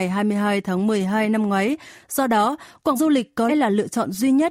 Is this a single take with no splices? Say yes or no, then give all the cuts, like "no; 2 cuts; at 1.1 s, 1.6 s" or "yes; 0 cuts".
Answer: no; 2 cuts; at 3.0 s, 3.5 s